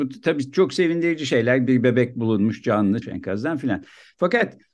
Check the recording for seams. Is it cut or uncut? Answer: cut